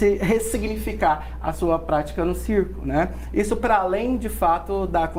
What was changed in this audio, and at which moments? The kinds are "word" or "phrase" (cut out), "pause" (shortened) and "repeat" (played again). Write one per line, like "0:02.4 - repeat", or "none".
none